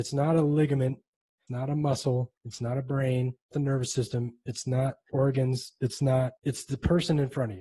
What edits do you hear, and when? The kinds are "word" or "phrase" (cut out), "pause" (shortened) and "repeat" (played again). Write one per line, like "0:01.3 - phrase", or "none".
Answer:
0:01.5 - word
0:02.4 - pause
0:03.5 - word
0:05.1 - word
0:06.4 - pause